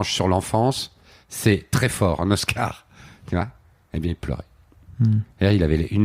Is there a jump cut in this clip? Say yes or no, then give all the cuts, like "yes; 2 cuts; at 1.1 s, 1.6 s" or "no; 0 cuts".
no; 0 cuts